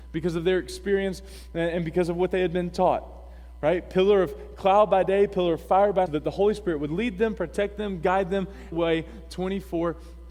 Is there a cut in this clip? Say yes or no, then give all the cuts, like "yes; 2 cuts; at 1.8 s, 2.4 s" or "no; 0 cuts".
yes; 2 cuts; at 6.1 s, 8.7 s